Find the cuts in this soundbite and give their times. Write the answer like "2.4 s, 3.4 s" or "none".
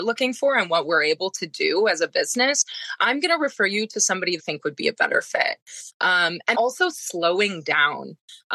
4.4 s, 6.5 s